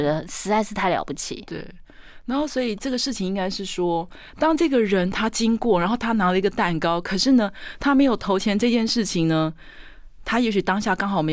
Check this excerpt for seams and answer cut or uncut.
uncut